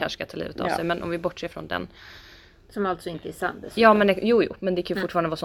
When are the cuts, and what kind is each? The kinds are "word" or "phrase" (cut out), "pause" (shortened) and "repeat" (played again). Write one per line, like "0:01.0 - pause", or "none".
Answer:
none